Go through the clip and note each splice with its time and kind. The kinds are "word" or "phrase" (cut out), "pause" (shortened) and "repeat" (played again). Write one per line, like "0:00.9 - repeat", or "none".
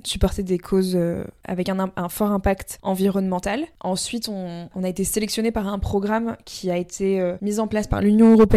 none